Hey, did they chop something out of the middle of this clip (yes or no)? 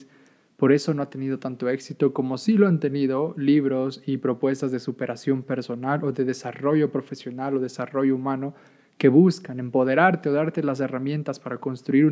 no